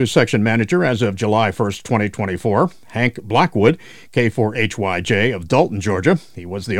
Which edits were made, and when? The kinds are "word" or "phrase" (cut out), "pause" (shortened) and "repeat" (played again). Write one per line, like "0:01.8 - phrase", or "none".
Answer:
none